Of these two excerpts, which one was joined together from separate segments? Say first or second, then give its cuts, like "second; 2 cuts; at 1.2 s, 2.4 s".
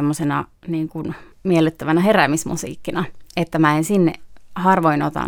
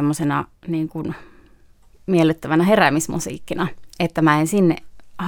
first; 1 cut; at 1.3 s